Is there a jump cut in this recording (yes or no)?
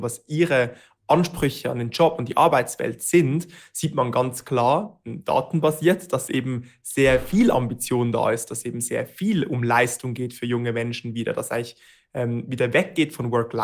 no